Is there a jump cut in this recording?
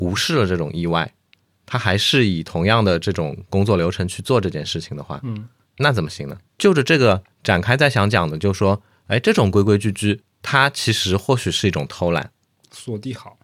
no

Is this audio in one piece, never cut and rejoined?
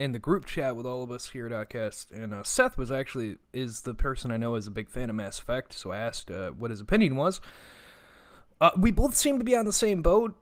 no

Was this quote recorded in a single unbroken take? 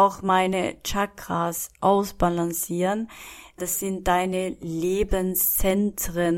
yes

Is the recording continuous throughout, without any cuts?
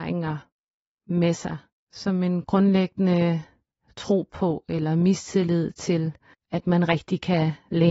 yes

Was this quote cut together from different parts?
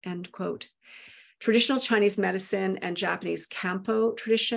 no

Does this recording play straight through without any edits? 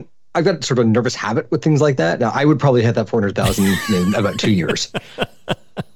yes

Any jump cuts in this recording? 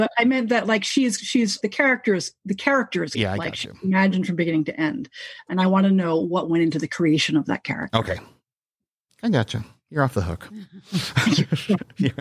yes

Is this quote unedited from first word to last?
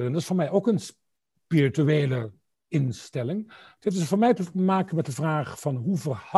yes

